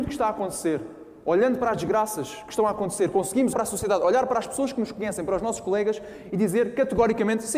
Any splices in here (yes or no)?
yes